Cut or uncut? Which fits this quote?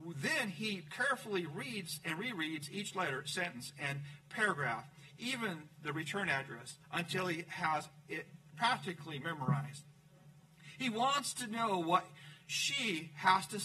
uncut